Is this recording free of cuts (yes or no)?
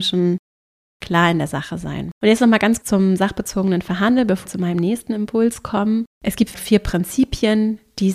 no